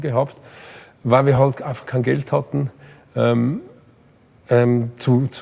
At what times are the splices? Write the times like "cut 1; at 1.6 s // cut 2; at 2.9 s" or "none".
none